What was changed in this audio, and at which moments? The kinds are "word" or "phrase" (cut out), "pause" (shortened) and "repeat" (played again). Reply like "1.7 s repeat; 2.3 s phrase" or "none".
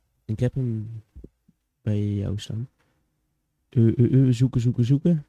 none